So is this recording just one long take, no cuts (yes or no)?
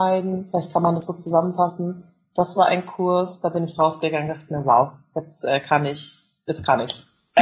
yes